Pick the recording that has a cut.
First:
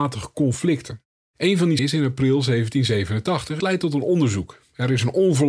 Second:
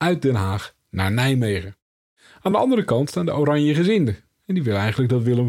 first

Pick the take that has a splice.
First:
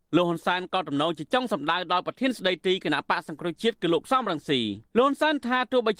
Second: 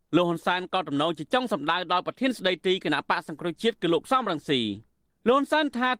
first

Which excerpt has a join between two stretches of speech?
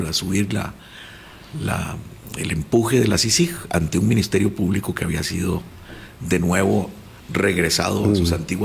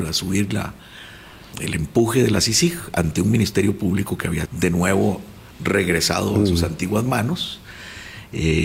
second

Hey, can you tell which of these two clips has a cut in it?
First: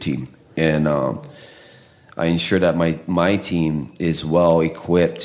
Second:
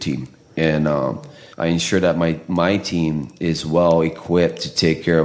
second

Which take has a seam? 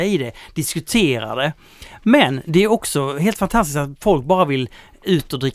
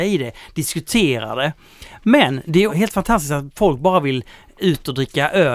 second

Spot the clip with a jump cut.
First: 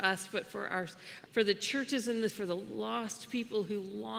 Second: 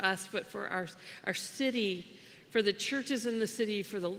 first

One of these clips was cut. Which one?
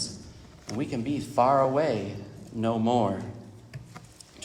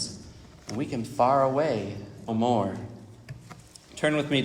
second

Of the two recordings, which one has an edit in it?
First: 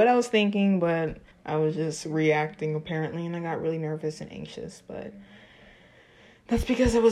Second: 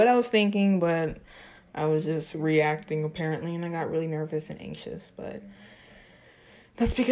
first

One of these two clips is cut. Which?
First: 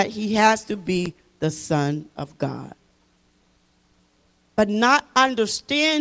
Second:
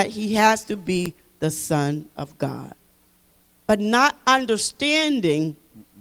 second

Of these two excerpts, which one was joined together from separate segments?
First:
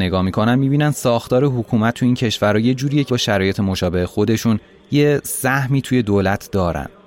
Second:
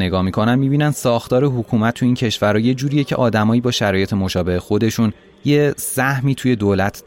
first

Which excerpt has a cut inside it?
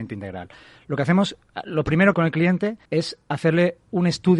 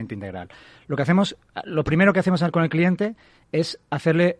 first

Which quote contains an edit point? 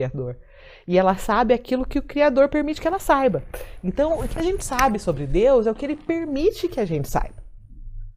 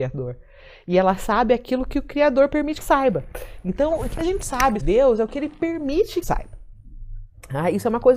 second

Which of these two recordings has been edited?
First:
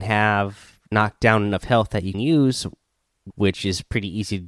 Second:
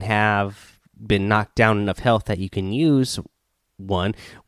first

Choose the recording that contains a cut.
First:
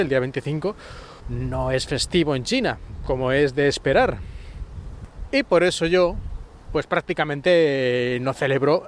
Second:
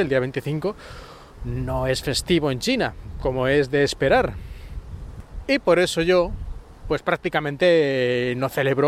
first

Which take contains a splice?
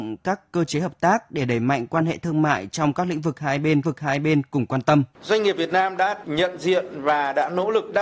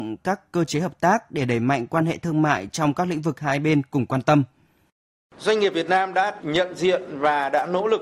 first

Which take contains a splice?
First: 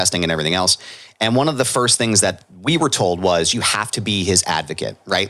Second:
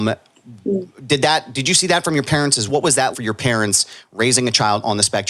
second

